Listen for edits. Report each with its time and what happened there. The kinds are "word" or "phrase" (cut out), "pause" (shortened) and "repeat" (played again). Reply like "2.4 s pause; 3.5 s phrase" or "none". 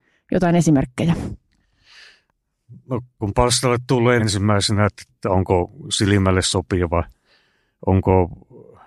3.2 s word; 4.2 s phrase; 5.1 s word